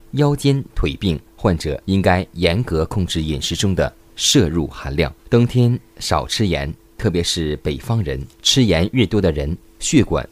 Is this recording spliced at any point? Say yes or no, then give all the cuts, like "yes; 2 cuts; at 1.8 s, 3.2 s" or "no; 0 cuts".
yes; 4 cuts; at 1.3 s, 1.8 s, 5.2 s, 8.3 s